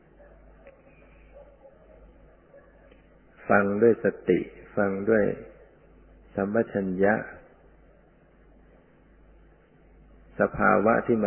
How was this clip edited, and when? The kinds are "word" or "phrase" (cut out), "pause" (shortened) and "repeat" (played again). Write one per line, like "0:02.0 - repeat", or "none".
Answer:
none